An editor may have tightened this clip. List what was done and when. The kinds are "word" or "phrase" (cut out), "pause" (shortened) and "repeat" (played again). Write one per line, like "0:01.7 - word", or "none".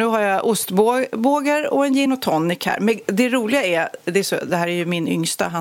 none